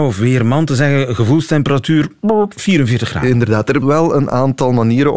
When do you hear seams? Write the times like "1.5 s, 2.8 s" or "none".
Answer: 3.8 s